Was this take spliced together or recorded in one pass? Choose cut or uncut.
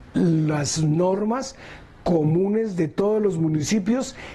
uncut